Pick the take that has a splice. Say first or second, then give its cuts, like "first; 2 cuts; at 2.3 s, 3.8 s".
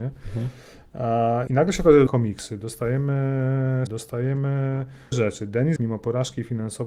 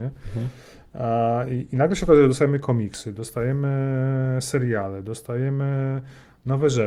first; 5 cuts; at 1.5 s, 2.1 s, 3.9 s, 5.1 s, 5.8 s